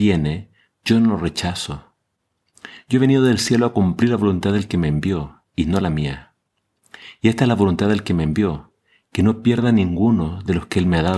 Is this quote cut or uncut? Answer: uncut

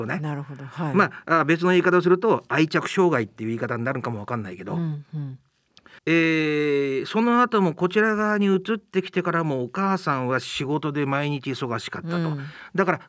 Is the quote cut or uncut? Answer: cut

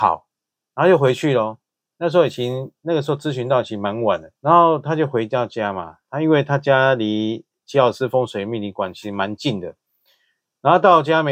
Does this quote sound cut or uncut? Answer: cut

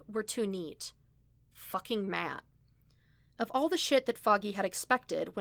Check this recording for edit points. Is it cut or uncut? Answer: uncut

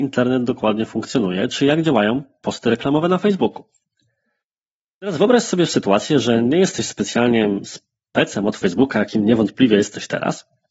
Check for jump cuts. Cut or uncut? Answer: uncut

